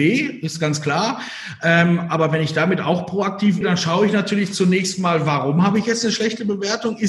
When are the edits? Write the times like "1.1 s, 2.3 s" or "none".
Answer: 3.6 s